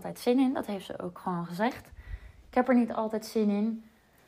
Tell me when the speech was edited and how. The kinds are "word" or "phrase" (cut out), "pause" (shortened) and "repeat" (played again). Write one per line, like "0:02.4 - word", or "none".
none

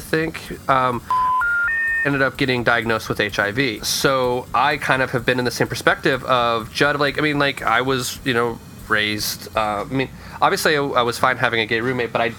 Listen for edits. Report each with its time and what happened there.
none

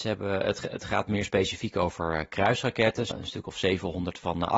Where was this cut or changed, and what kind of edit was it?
0:03.1 - phrase

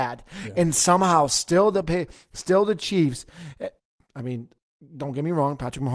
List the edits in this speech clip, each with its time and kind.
none

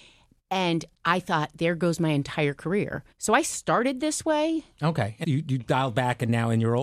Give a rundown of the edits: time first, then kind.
0:00.9 - pause
0:03.1 - pause
0:05.2 - phrase

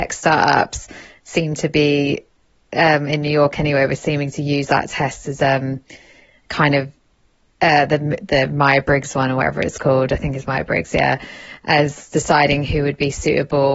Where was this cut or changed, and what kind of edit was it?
none

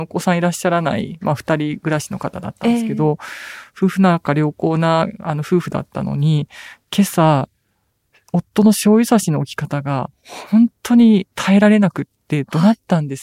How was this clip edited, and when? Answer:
0:11.3 - pause

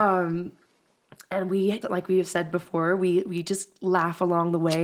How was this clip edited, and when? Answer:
0:01.8 - word

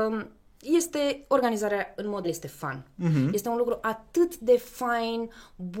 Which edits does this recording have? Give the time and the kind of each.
0:02.2 - word

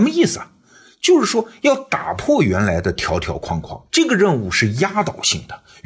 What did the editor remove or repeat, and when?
0:03.9 - pause

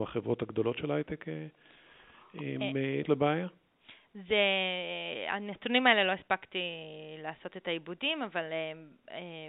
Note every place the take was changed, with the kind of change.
0:03.0 - word

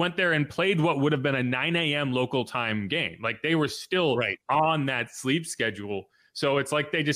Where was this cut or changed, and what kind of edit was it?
none

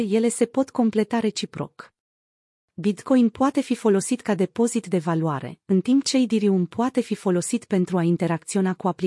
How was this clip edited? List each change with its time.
none

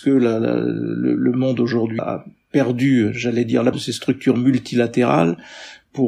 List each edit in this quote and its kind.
0:02.0 - word
0:03.7 - word

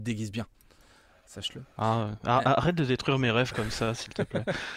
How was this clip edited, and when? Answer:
none

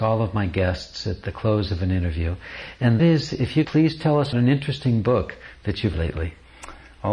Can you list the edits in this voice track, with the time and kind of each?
0:03.0 - word
0:03.6 - word
0:04.3 - word
0:05.9 - word

